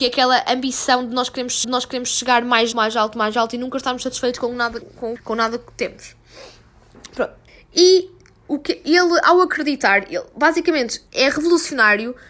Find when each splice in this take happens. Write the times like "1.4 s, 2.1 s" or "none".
1.6 s, 2.7 s, 4.8 s, 5.2 s, 7.5 s, 11.1 s